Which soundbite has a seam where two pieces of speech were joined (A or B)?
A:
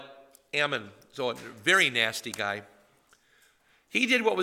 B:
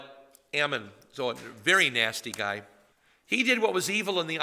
B